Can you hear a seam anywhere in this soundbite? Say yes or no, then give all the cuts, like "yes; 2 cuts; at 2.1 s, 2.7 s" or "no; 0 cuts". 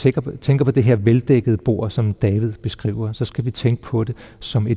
no; 0 cuts